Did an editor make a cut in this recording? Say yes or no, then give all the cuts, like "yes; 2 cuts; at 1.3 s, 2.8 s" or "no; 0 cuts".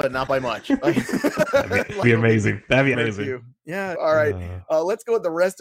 yes; 3 cuts; at 2.0 s, 2.9 s, 3.9 s